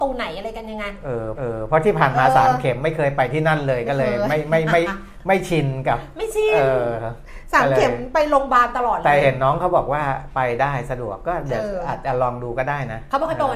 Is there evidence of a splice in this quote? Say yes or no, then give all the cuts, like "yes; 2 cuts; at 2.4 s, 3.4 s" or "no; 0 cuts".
yes; 1 cut; at 1.3 s